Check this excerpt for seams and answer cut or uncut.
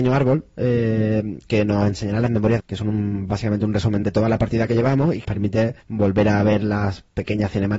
cut